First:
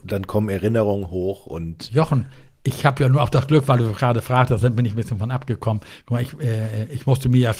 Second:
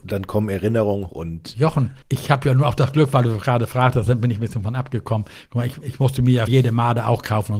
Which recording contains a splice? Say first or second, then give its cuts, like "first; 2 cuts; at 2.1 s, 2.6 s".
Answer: second; 4 cuts; at 1.1 s, 2.0 s, 5.8 s, 6.5 s